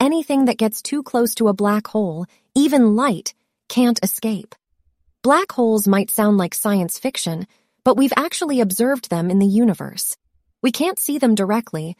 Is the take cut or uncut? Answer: uncut